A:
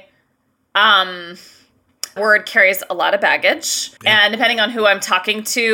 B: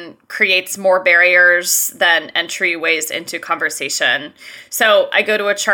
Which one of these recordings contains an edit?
A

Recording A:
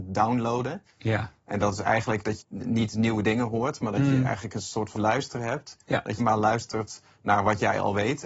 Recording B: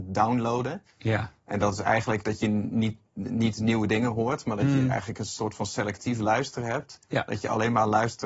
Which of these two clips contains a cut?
A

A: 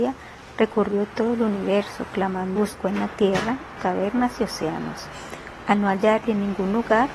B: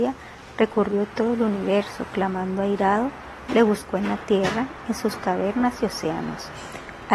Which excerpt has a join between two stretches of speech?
A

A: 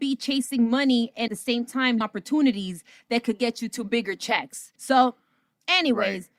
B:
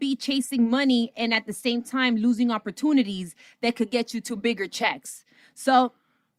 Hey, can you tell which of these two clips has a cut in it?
A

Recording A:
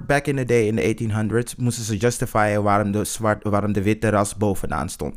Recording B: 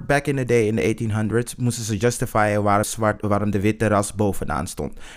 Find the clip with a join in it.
B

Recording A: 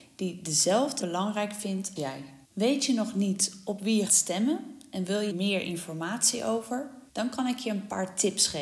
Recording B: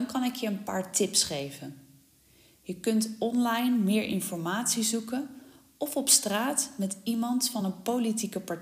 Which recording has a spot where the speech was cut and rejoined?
A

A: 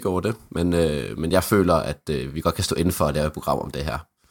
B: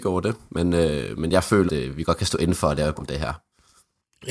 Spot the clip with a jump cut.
B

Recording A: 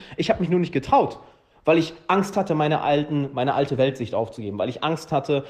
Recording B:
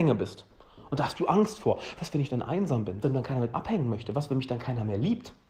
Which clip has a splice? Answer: B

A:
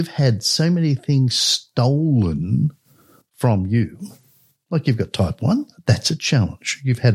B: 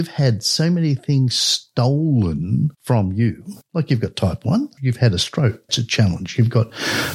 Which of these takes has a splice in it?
B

